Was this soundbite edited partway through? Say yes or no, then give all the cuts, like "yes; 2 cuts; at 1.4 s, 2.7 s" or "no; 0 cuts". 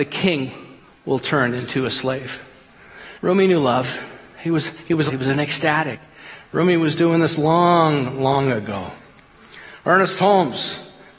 yes; 2 cuts; at 3.2 s, 5.1 s